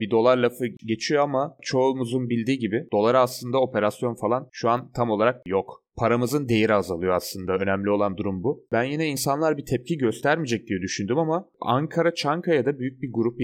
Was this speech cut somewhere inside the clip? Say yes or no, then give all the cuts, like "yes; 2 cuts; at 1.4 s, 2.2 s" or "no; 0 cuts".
no; 0 cuts